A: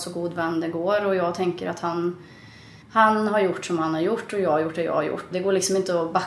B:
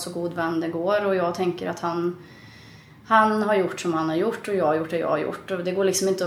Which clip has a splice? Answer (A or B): A